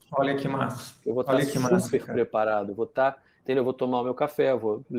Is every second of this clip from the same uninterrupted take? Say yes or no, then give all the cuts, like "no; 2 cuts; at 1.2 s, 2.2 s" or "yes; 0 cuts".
yes; 0 cuts